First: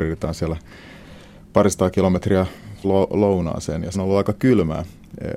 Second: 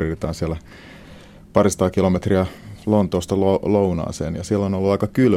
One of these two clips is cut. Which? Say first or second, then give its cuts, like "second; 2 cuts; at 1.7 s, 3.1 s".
first; 2 cuts; at 2.8 s, 3.9 s